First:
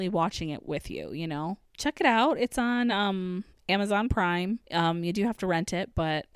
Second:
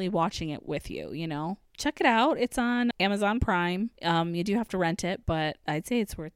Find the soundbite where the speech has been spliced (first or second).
second